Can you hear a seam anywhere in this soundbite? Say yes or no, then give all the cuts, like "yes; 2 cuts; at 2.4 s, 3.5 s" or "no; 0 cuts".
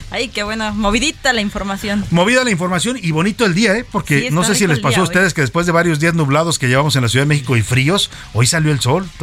no; 0 cuts